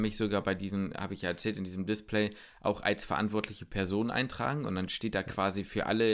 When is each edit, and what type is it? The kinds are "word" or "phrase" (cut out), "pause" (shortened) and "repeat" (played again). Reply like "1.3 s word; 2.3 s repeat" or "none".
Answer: none

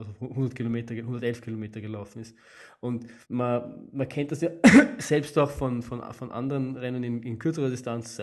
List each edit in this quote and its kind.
3.2 s pause

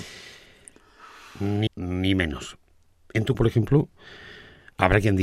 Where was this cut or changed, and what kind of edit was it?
1.7 s word; 3.3 s word

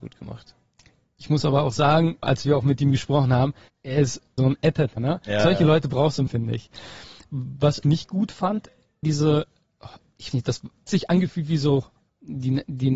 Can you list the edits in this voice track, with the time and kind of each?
2.2 s word; 3.7 s word; 4.4 s word; 5.0 s word; 6.3 s word; 7.8 s word; 9.0 s word; 10.3 s word; 10.9 s word

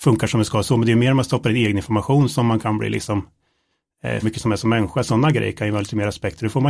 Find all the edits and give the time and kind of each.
4.2 s word

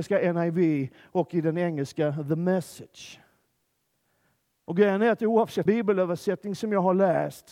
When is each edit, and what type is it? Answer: 5.7 s word

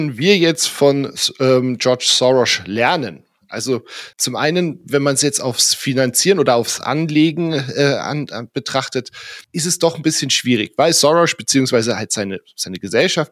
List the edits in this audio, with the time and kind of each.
4.1 s pause; 9.4 s pause

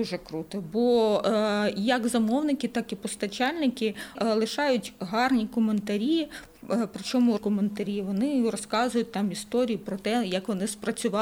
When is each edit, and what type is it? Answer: 4.2 s word; 7.4 s word

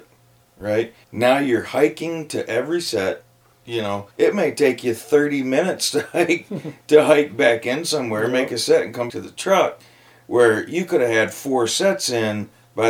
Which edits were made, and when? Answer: 1.0 s pause; 4.1 s pause; 9.1 s word

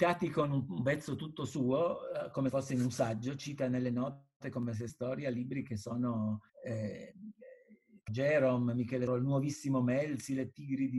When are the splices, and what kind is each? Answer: 2.5 s word; 4.4 s pause; 4.9 s phrase; 6.5 s pause; 8.1 s word; 9.1 s phrase

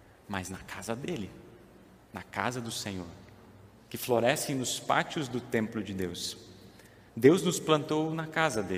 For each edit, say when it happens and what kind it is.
2.0 s pause; 7.1 s pause

